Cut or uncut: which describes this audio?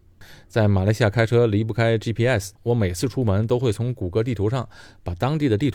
cut